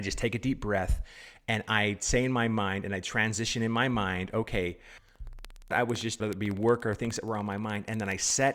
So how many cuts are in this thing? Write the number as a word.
two